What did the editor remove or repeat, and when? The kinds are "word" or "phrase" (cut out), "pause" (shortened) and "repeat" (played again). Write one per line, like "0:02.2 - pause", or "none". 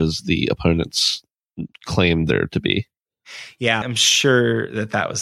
0:01.7 - pause
0:03.8 - word